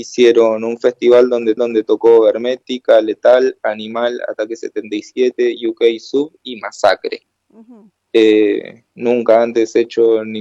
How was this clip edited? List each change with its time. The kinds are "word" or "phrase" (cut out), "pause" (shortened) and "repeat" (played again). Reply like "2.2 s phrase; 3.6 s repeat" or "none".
1.6 s repeat